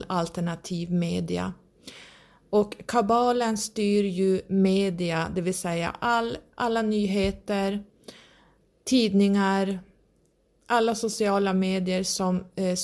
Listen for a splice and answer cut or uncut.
uncut